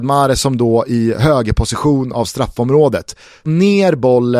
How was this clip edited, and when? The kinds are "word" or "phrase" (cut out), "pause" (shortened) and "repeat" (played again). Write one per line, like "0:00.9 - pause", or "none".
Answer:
0:03.5 - word